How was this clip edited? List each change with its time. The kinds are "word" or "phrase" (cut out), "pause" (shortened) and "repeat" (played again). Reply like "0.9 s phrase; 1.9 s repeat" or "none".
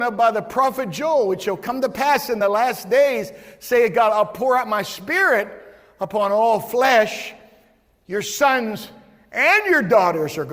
none